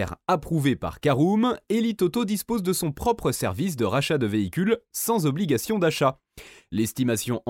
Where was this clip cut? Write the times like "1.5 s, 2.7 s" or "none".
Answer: none